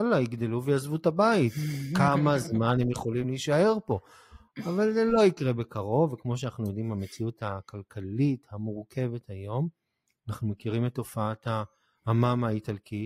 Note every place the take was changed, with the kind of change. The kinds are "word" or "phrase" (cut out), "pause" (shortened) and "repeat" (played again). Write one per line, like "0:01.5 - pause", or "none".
none